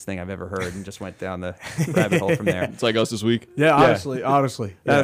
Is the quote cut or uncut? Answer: uncut